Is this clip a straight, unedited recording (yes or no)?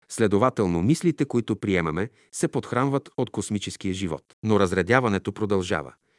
no